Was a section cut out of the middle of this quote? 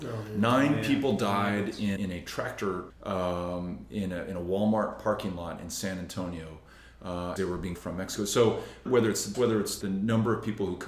yes; 7 cuts; at 2.0 s, 2.9 s, 7.4 s, 7.7 s, 8.9 s, 9.3 s, 9.8 s

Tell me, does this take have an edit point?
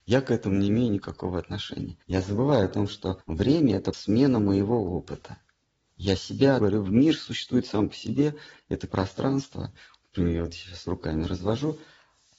yes; 6 cuts; at 2.0 s, 3.2 s, 3.9 s, 5.6 s, 6.6 s, 8.9 s

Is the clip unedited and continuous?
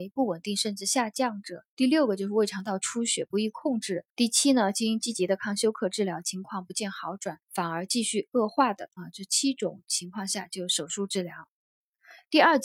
no; 3 cuts; at 1.7 s, 4.1 s, 7.4 s

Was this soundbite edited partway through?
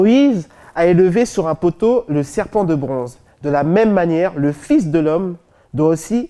no; 0 cuts

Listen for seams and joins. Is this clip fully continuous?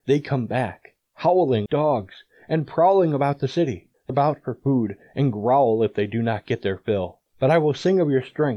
no; 2 cuts; at 1.7 s, 4.1 s

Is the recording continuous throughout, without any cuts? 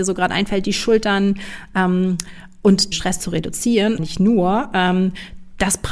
no; 2 cuts; at 2.9 s, 4.0 s

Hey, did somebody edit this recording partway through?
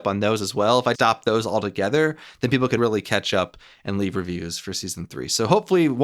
yes; 2 cuts; at 0.9 s, 2.8 s

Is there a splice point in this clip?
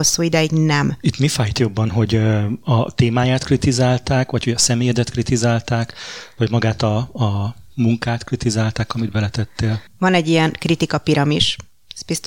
yes; 1 cut; at 9.9 s

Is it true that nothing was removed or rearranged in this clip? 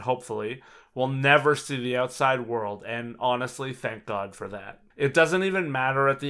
no; 1 cut; at 4.9 s

